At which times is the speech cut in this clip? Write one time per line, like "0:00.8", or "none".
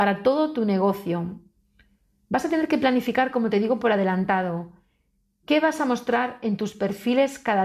none